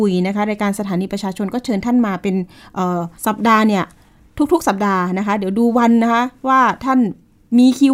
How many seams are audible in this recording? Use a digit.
1